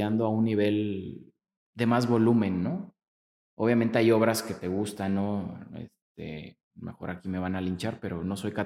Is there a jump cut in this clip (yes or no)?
yes